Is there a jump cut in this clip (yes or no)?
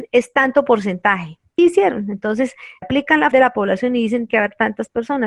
yes